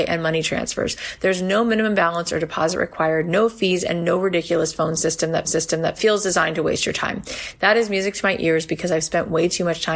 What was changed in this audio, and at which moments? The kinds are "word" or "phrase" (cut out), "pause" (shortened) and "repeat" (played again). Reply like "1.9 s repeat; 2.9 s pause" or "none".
5.4 s repeat